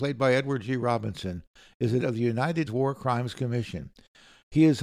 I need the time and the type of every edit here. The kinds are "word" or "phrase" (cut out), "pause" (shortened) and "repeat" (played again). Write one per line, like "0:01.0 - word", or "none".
0:02.0 - word
0:02.7 - word